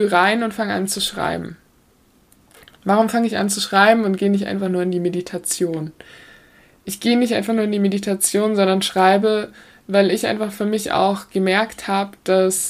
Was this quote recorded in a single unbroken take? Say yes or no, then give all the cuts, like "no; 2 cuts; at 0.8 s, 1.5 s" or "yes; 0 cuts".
yes; 0 cuts